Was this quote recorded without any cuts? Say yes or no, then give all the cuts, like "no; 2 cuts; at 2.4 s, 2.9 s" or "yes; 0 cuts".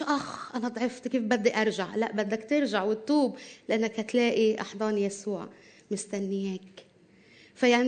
yes; 0 cuts